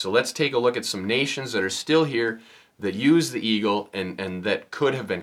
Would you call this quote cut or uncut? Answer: uncut